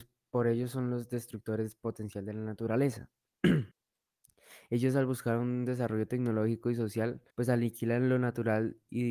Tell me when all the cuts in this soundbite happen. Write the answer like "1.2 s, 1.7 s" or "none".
3.7 s, 7.3 s